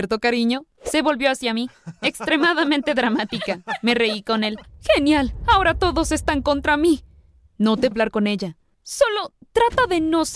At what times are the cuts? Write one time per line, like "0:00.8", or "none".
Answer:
0:07.9